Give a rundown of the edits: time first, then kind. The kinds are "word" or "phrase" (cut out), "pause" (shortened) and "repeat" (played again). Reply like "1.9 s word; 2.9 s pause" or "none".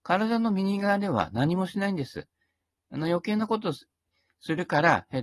none